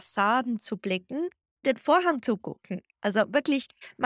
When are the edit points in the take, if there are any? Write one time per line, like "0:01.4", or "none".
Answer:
0:01.6